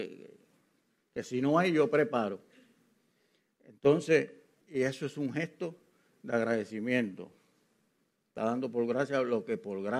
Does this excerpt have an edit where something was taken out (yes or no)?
yes